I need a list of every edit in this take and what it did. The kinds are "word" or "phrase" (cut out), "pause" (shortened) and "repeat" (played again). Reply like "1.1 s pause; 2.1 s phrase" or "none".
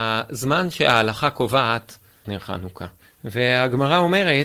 2.2 s word; 3.1 s pause